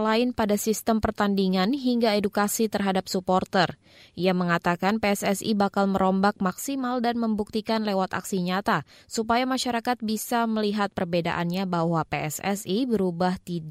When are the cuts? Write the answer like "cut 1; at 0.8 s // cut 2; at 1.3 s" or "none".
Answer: none